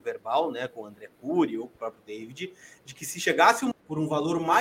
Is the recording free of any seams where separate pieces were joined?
no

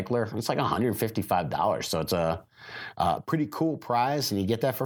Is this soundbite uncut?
yes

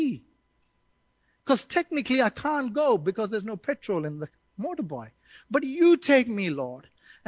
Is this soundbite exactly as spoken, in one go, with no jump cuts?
yes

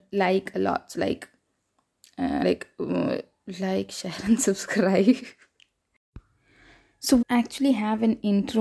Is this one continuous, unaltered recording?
no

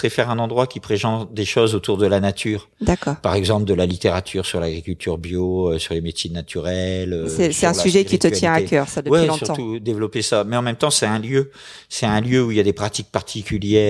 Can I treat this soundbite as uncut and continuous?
yes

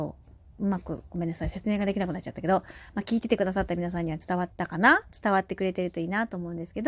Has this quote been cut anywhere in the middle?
yes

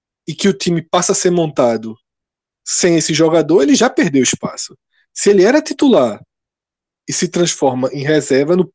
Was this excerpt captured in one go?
yes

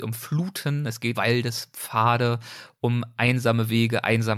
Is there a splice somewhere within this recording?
yes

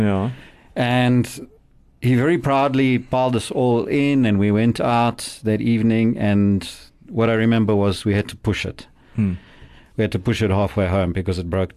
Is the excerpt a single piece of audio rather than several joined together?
yes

